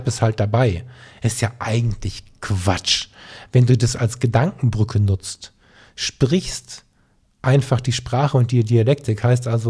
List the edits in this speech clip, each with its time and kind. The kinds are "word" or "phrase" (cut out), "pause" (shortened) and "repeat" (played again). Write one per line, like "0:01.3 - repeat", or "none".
none